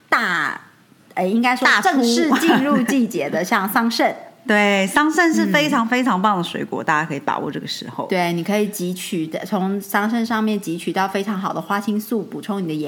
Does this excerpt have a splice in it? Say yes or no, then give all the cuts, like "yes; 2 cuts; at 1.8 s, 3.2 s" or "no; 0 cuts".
no; 0 cuts